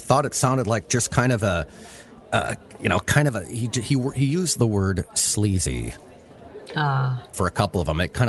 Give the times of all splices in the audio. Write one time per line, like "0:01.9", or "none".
0:07.3